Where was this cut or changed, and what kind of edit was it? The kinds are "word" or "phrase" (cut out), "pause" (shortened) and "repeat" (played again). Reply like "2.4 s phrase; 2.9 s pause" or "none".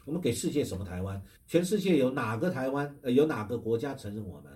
1.4 s pause